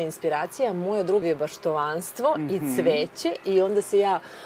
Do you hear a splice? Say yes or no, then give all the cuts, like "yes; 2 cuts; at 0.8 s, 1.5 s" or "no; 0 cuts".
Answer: yes; 1 cut; at 1.2 s